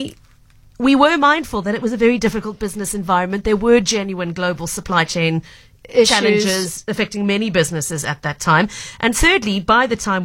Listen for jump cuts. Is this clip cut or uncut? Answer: uncut